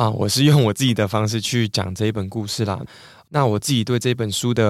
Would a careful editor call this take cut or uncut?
uncut